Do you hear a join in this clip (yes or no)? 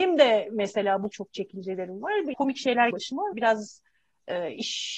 yes